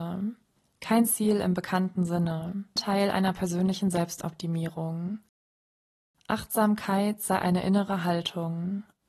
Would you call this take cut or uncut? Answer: cut